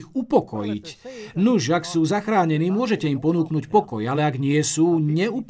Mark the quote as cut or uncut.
uncut